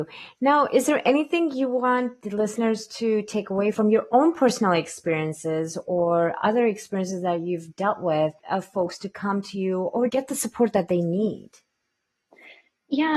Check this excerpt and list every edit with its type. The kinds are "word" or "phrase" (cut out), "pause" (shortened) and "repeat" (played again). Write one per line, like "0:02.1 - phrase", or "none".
0:08.4 - pause
0:10.1 - word